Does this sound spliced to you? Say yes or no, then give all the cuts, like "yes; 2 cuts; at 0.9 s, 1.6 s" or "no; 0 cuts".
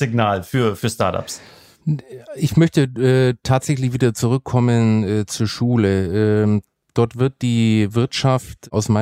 no; 0 cuts